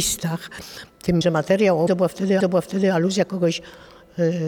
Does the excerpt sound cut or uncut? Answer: cut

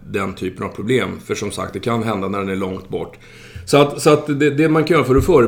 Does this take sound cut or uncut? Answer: uncut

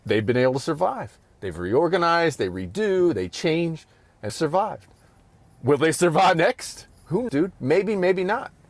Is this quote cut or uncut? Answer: cut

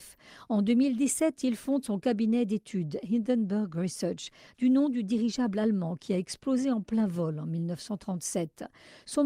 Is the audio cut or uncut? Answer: uncut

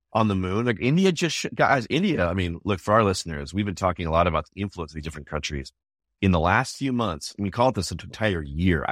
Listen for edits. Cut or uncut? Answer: uncut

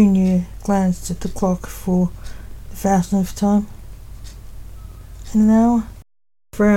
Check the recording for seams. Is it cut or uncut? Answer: uncut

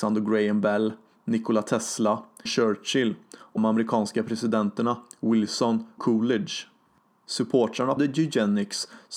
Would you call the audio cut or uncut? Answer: cut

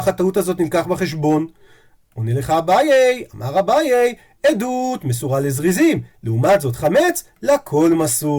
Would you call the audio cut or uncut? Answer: uncut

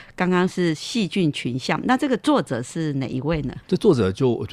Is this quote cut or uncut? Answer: cut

